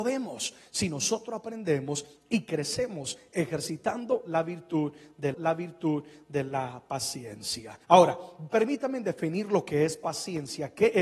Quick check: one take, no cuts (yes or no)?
no